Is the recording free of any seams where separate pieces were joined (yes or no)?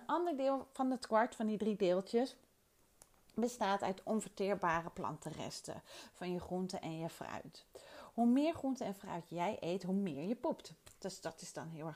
yes